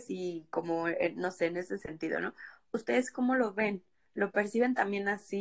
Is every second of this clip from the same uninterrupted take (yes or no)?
yes